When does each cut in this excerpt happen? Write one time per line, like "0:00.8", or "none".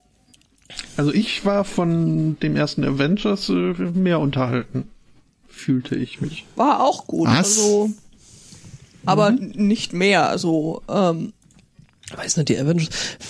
none